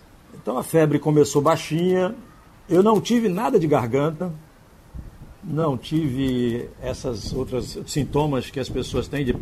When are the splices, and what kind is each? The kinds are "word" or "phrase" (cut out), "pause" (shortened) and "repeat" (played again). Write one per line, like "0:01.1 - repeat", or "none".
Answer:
none